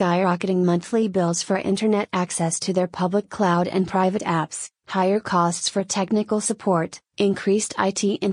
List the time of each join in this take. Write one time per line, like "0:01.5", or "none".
none